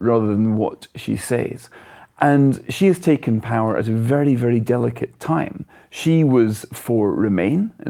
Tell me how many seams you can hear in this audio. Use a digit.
0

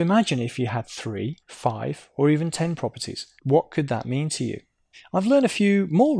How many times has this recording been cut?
3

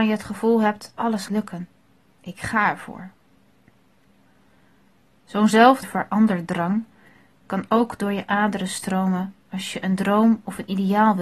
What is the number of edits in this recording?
3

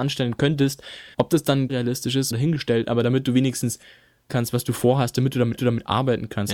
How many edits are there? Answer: 5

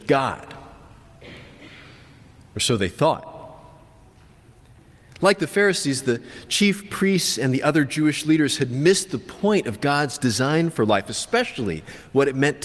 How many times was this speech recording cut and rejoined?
0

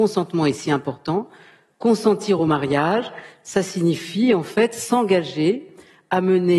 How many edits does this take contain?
0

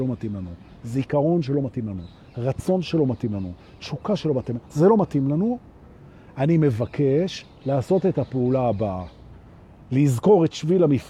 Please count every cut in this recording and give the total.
0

